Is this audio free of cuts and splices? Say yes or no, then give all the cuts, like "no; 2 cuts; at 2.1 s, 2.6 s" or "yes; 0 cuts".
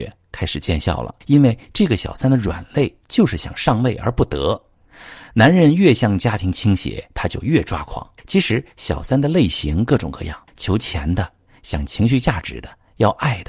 no; 4 cuts; at 1.2 s, 8.2 s, 10.5 s, 11.5 s